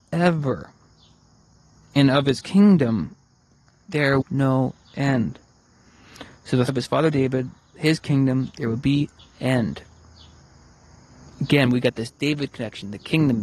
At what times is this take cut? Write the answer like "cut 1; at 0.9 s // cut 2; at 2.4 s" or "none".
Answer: cut 1; at 4.2 s // cut 2; at 6.7 s // cut 3; at 9.2 s